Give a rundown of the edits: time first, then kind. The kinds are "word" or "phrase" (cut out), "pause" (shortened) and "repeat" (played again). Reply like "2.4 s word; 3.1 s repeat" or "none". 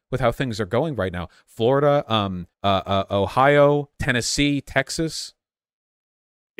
2.5 s pause; 3.9 s pause